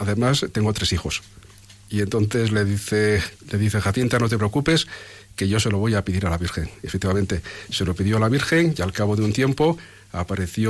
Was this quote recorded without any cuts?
yes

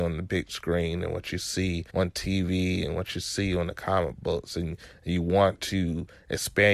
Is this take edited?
yes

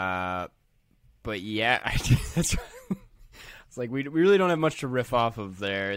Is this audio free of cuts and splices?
yes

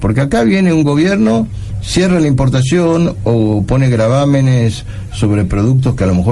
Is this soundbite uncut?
yes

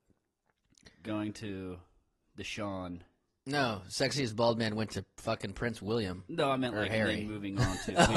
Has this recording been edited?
no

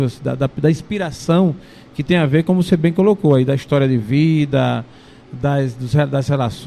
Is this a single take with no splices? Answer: yes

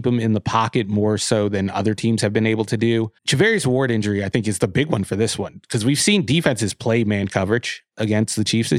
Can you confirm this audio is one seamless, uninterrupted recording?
no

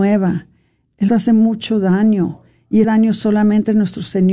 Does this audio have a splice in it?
yes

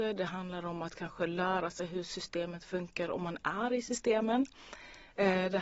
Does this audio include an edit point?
no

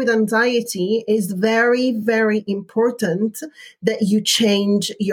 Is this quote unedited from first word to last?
yes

